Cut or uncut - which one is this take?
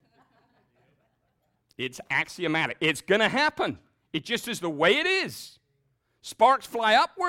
uncut